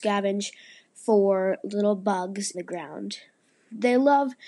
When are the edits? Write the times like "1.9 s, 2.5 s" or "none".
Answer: 2.5 s